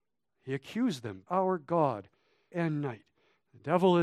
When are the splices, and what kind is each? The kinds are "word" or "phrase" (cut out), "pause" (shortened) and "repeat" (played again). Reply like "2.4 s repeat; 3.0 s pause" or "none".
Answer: 1.3 s word; 2.5 s word